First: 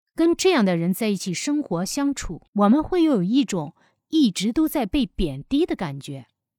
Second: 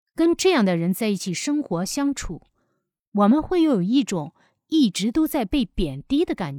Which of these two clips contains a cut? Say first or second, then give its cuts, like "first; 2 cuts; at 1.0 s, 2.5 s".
first; 1 cut; at 2.5 s